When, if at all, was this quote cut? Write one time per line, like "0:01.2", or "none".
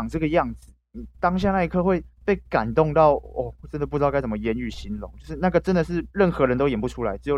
0:02.1
0:06.1

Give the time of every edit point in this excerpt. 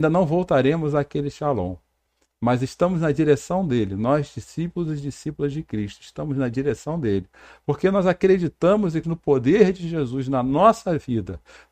0:09.0

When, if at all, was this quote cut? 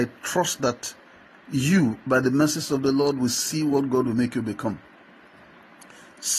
none

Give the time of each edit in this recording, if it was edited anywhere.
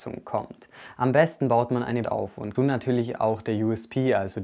0:02.0
0:02.5

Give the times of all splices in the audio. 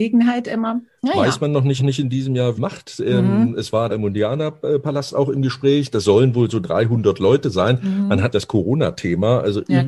0:01.8
0:02.6
0:03.9
0:08.3

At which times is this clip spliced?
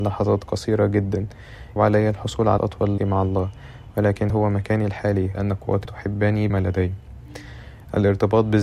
0:01.8
0:02.6
0:03.0
0:04.3
0:05.3
0:05.8
0:06.5

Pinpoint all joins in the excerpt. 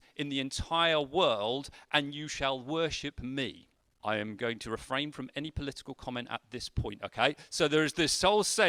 0:03.7

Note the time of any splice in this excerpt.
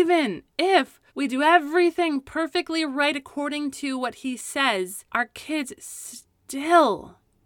0:01.1
0:05.1

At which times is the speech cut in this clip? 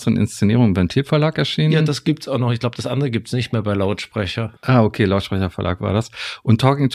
0:04.6

